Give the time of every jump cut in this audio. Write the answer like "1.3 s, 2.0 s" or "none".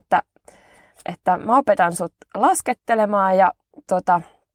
none